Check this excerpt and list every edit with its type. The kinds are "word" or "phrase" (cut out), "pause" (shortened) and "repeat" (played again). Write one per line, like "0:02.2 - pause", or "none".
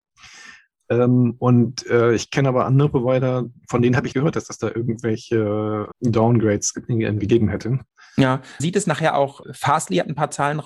0:04.1 - word
0:05.9 - word
0:08.6 - phrase
0:09.4 - word